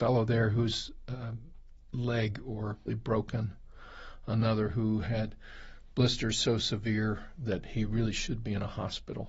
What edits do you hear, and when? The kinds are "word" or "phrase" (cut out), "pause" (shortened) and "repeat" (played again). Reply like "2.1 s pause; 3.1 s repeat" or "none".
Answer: 2.9 s phrase